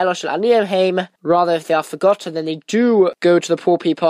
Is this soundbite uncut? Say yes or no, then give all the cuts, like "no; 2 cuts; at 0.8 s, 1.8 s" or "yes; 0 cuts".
yes; 0 cuts